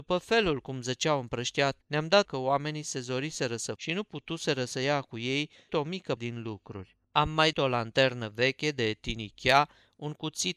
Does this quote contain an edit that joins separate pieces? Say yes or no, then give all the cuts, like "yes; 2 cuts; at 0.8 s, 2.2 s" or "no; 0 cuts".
yes; 6 cuts; at 1.8 s, 2.2 s, 3.8 s, 5.7 s, 6.2 s, 7.5 s